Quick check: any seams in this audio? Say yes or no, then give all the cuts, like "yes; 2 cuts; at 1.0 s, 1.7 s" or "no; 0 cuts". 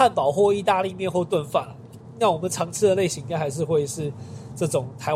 no; 0 cuts